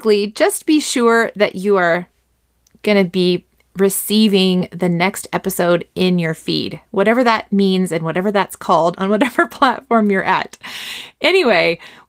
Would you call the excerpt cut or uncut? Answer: uncut